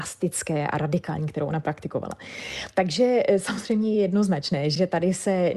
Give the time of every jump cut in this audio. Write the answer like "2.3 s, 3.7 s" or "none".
none